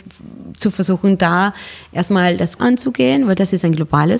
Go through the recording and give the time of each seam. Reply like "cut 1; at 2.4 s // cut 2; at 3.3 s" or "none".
cut 1; at 2.6 s